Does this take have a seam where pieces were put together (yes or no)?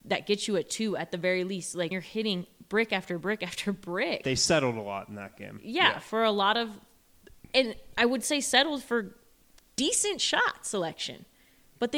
yes